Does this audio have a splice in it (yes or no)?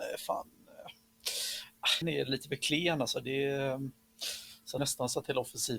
yes